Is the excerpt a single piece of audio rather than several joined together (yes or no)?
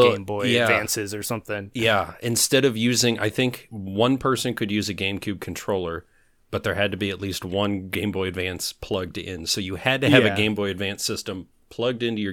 yes